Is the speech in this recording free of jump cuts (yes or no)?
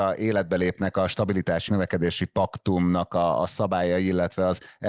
no